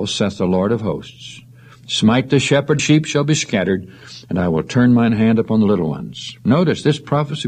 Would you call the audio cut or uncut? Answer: cut